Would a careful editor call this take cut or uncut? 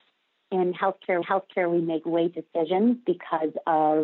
cut